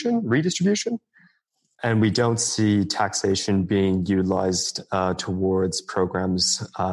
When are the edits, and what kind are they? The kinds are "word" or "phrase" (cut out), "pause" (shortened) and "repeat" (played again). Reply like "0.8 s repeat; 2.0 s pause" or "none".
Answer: none